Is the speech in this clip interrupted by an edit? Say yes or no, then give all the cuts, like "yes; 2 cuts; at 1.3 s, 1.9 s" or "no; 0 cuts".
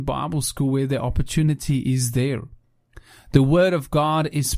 no; 0 cuts